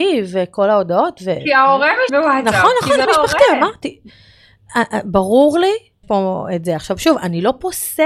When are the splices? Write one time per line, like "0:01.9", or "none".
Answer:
0:02.1
0:03.0
0:06.0